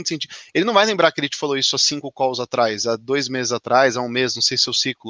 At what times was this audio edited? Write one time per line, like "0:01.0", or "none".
none